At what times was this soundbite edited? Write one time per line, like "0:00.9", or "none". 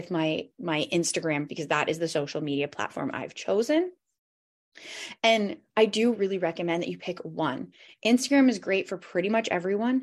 0:01.5
0:06.2